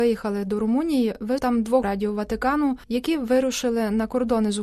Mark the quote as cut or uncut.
cut